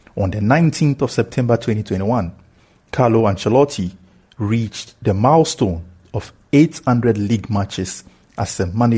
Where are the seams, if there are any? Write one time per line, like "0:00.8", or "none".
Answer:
none